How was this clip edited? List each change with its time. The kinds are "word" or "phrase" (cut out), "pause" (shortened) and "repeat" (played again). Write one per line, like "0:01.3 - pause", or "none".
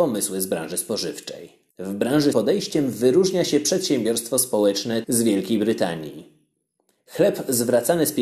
0:01.7 - pause
0:02.3 - phrase
0:05.0 - word